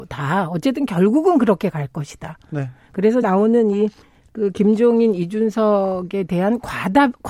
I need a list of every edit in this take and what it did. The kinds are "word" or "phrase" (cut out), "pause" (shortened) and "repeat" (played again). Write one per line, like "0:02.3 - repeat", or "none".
0:03.2 - word
0:04.0 - pause